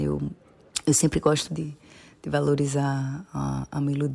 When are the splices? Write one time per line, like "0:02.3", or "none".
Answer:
0:01.5